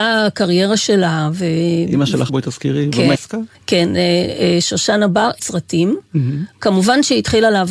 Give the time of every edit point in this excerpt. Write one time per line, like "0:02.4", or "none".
0:02.3
0:03.1
0:03.5
0:05.4